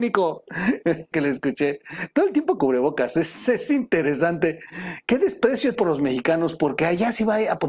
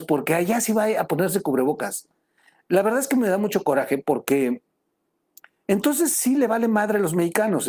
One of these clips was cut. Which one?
first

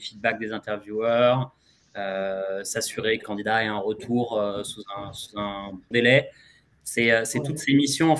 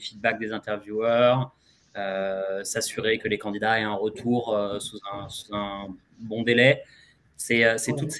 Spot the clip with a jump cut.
first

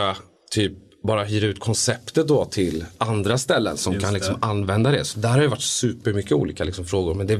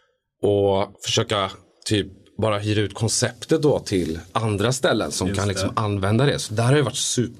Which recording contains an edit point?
second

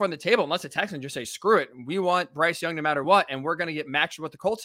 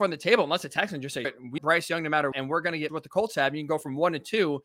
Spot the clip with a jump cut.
second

